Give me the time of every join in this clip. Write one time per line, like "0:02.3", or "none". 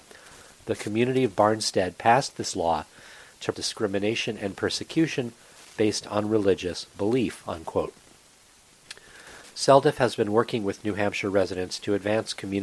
0:03.5